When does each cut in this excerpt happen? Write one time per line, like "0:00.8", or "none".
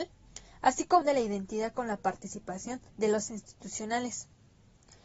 0:01.0
0:02.9
0:03.3